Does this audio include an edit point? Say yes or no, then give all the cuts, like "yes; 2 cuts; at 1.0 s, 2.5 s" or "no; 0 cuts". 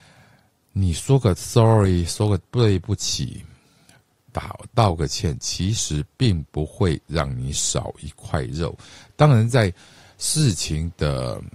no; 0 cuts